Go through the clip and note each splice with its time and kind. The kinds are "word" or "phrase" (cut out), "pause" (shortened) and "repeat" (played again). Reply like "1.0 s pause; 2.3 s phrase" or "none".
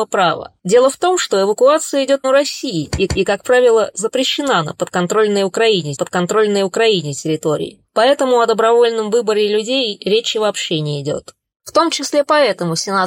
2.2 s phrase; 3.1 s repeat; 6.0 s repeat; 11.5 s pause

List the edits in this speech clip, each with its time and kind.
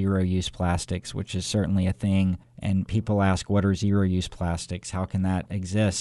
none

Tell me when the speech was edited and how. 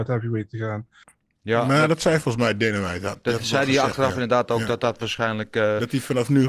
none

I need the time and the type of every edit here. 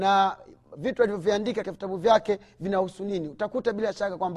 1.6 s word

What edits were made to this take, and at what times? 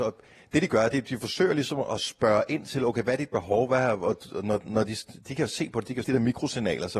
6.0 s phrase

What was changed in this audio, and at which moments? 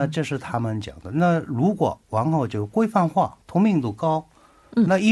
2.0 s pause; 3.4 s pause

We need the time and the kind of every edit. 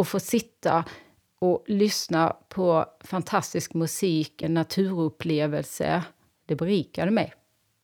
4.4 s word

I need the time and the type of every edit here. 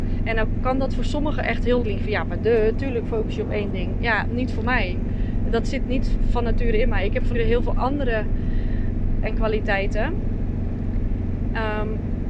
1.8 s word; 7.3 s word; 9.2 s word

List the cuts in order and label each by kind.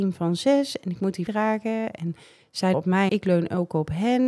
1.3 s word; 2.7 s word; 3.1 s word

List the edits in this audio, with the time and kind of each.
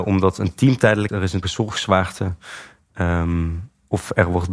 1.1 s word; 1.4 s word

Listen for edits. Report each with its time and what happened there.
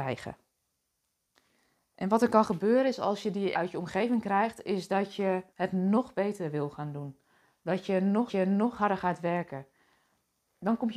3.5 s phrase; 5.5 s pause; 8.3 s repeat

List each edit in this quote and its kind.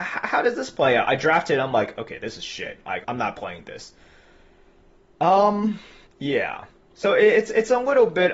3.0 s word; 6.0 s pause

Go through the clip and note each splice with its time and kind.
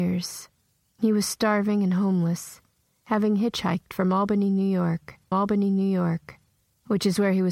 5.3 s repeat

